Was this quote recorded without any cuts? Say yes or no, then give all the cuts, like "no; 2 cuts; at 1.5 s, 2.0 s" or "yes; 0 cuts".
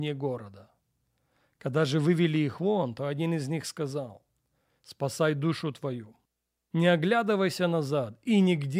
yes; 0 cuts